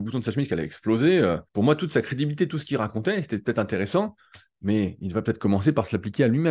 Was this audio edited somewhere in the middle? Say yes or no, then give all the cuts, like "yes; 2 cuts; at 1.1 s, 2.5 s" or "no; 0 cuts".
yes; 1 cut; at 1.5 s